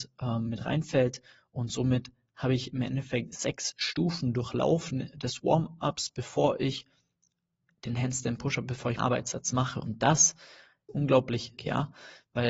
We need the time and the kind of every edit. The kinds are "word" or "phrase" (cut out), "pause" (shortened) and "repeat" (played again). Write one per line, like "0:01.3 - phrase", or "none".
0:09.0 - word
0:10.9 - word
0:11.6 - word